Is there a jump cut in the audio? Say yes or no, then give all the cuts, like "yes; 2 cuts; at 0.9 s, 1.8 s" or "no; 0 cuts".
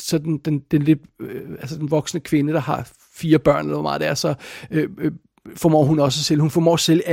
no; 0 cuts